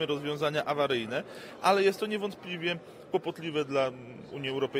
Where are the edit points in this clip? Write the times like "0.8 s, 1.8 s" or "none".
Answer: none